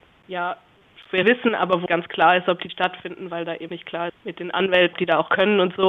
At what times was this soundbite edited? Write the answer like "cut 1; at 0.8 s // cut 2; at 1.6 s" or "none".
cut 1; at 1.2 s // cut 2; at 1.9 s // cut 3; at 2.7 s // cut 4; at 3.7 s // cut 5; at 4.1 s // cut 6; at 4.9 s